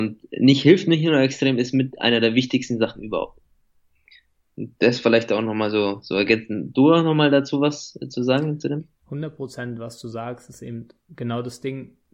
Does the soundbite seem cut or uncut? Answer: uncut